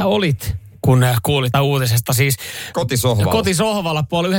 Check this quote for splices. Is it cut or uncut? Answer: cut